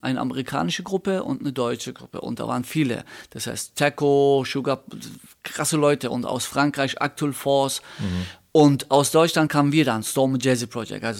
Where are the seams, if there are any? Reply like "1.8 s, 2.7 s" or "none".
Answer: none

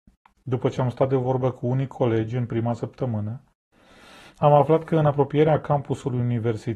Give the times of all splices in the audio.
none

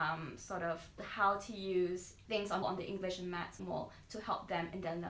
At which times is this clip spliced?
1.0 s, 2.2 s, 2.6 s, 3.6 s

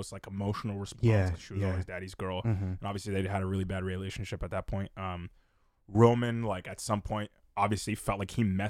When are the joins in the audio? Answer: none

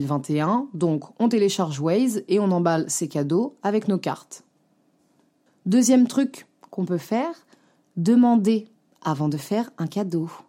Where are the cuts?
none

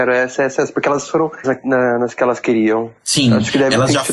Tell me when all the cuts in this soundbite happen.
1.4 s, 3.0 s

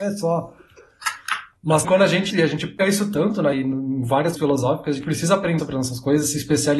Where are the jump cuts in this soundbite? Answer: 1.8 s, 2.3 s, 2.8 s, 3.5 s, 4.4 s, 5.0 s, 5.6 s

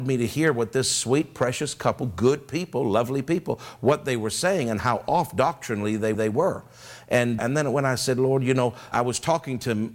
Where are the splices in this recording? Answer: 6.1 s, 7.4 s, 8.9 s

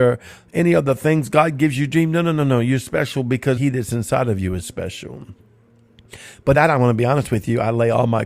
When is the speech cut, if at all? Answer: 3.6 s, 6.5 s

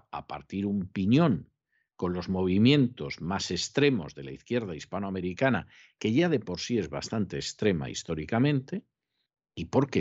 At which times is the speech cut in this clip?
none

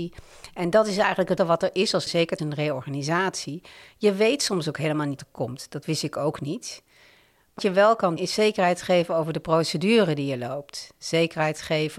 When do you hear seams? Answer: 1.4 s, 2.1 s, 2.4 s, 5.2 s, 7.6 s, 8.2 s

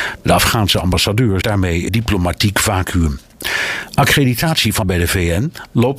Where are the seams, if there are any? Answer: 1.4 s, 1.9 s, 4.8 s

